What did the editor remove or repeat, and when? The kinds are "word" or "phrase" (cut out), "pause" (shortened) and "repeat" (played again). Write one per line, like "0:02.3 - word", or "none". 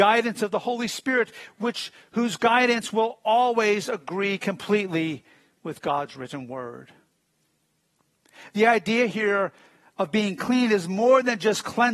none